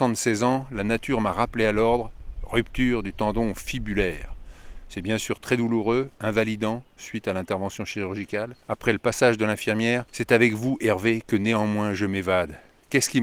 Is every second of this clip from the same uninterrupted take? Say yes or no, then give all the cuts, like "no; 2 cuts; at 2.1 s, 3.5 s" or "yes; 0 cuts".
no; 2 cuts; at 8.6 s, 10.1 s